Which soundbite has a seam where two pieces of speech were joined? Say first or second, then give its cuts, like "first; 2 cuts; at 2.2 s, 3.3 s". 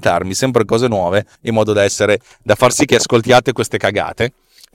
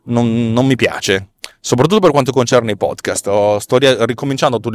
first; 1 cut; at 1.4 s